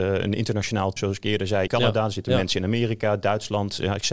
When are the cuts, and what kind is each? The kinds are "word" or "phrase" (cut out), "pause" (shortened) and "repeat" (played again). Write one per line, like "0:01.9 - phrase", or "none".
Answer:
0:01.0 - word
0:01.7 - phrase